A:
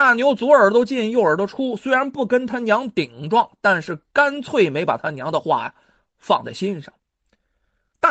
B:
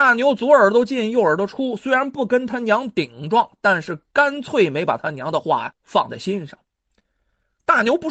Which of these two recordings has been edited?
B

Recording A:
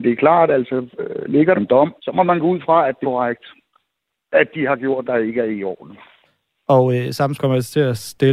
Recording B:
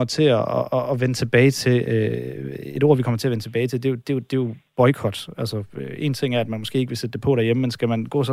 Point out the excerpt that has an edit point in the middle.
A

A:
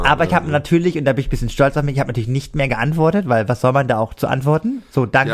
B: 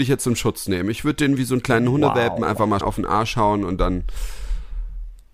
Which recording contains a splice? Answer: B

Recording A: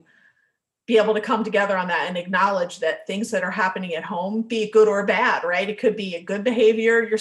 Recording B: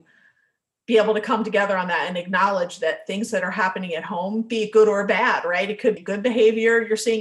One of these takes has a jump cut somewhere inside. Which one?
B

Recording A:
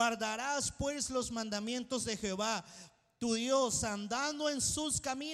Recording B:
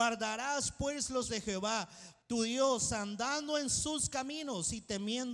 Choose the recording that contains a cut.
B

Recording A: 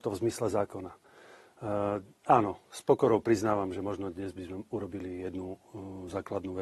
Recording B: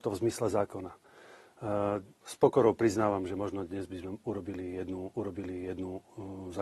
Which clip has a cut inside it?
B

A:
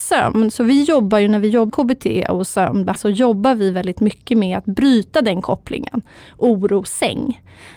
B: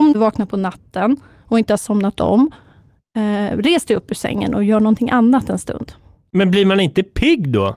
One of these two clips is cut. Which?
A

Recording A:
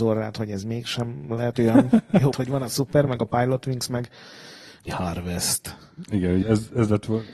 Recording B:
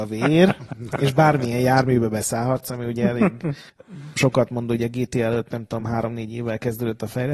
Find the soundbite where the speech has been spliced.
A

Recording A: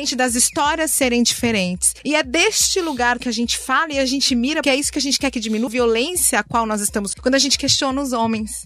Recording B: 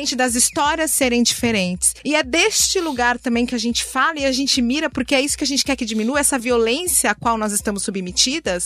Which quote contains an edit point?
A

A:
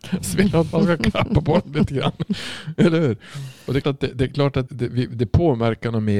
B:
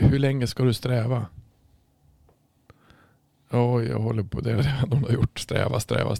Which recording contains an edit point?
A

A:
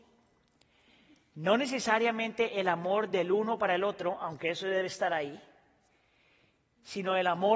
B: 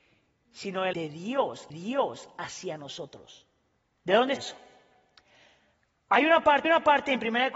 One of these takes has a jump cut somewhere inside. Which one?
B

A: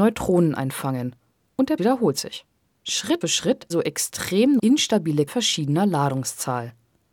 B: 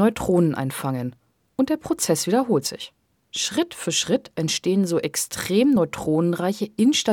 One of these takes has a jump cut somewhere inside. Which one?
A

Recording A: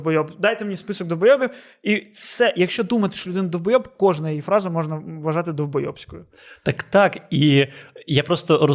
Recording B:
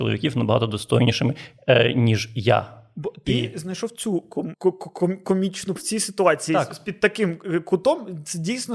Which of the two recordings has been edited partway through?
B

